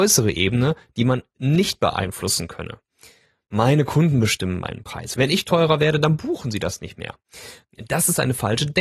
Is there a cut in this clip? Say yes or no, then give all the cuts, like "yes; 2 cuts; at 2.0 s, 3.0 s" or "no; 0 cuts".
no; 0 cuts